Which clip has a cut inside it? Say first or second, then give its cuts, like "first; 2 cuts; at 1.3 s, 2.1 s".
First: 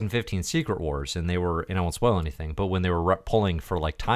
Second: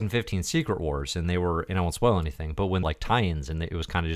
second; 1 cut; at 2.8 s